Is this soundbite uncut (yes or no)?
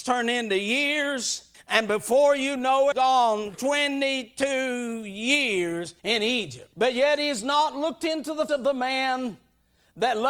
no